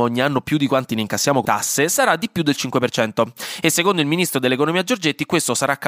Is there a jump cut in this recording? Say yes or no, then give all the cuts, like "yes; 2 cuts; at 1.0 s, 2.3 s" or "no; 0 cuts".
yes; 1 cut; at 1.4 s